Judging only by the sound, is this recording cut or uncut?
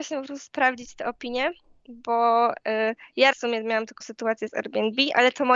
cut